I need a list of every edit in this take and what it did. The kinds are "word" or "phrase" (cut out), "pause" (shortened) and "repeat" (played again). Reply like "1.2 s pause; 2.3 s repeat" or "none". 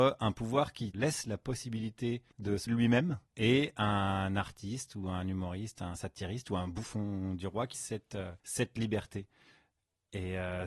0.9 s word; 2.3 s pause; 2.7 s word; 3.3 s pause; 7.7 s word; 8.4 s pause